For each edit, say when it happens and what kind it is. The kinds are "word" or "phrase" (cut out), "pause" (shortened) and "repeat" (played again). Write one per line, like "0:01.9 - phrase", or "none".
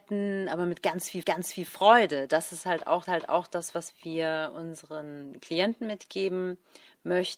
0:01.2 - repeat
0:03.0 - repeat